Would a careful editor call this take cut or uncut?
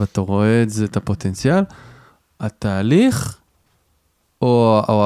uncut